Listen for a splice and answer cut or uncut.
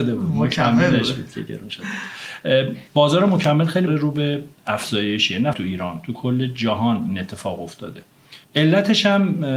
cut